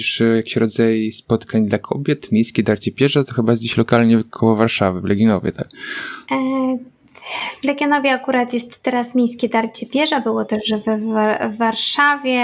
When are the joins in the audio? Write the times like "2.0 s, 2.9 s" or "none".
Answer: none

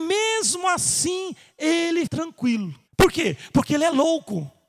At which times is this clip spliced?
2.1 s, 2.9 s

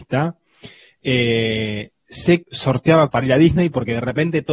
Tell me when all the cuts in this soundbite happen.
2.4 s, 3.1 s

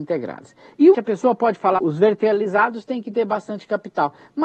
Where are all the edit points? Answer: 0.9 s, 1.8 s

